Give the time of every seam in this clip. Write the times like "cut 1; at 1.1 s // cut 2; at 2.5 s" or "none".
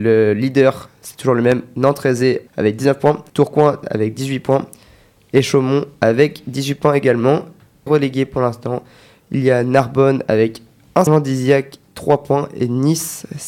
cut 1; at 2.5 s // cut 2; at 3.3 s // cut 3; at 7.9 s // cut 4; at 11.1 s

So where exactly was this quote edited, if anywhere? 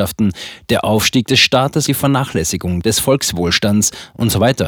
cut 1; at 1.9 s

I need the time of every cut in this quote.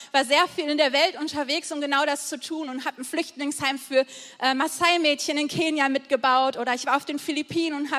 none

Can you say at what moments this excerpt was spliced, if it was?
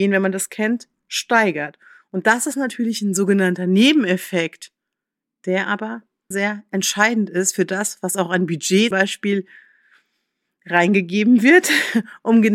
cut 1; at 6.3 s // cut 2; at 8.9 s

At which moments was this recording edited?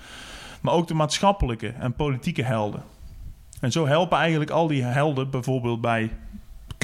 none

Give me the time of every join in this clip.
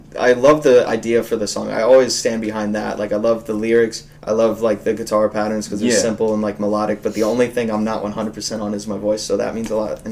cut 1; at 4.2 s

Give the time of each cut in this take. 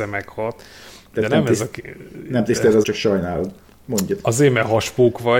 cut 1; at 2.8 s

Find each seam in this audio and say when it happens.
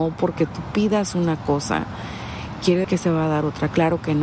cut 1; at 2.8 s

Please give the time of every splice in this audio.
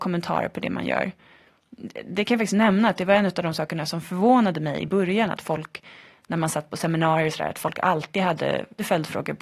none

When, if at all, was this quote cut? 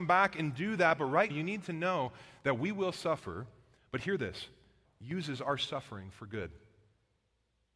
cut 1; at 1.3 s // cut 2; at 4.8 s

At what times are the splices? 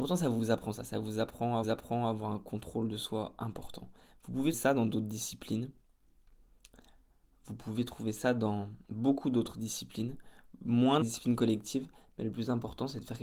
cut 1; at 1.6 s // cut 2; at 4.5 s // cut 3; at 8.8 s // cut 4; at 11.0 s

